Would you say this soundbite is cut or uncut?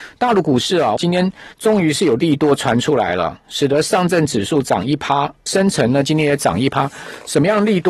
cut